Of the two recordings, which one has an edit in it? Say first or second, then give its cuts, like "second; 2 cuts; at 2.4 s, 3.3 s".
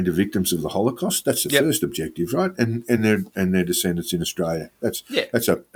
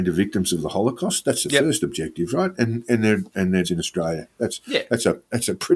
second; 1 cut; at 3.6 s